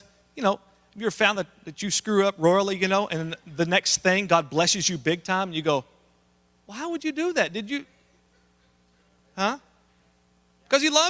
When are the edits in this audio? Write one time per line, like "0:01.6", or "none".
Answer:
none